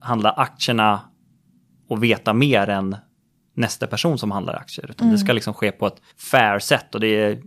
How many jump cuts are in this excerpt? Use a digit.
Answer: 1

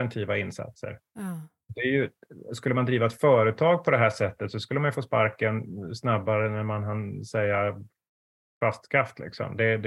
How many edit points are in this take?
0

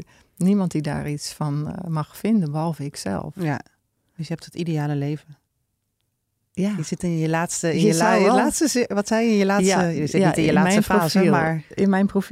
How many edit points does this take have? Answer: 0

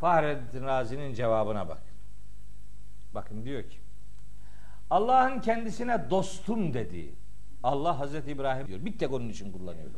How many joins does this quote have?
1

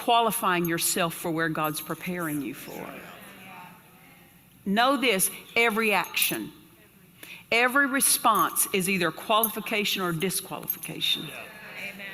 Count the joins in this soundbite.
0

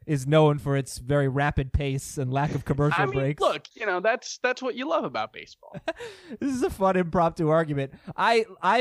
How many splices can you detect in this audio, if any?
1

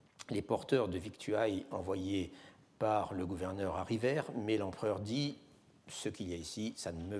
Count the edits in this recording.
0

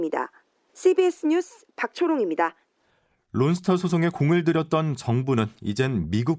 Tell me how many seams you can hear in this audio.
0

